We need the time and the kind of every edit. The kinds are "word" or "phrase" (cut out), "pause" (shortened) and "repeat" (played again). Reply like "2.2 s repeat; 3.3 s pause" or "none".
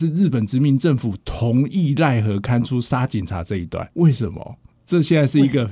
3.9 s pause

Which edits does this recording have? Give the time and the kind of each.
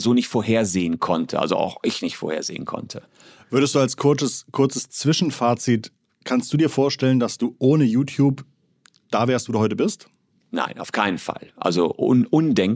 none

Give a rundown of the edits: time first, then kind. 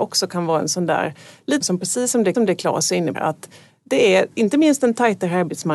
1.6 s word; 2.3 s repeat; 3.1 s phrase; 4.3 s pause

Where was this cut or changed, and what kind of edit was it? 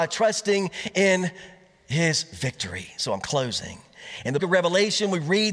4.4 s word

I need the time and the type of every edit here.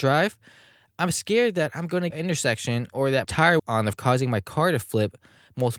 2.1 s phrase; 3.2 s word; 3.6 s phrase; 3.9 s word

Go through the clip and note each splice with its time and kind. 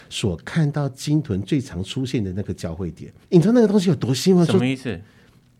3.2 s pause

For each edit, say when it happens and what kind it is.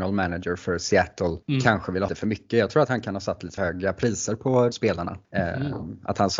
1.4 s pause; 2.1 s word; 3.6 s word; 4.7 s word; 5.2 s pause

